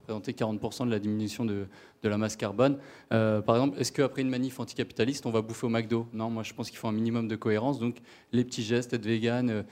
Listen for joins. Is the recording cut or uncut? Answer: uncut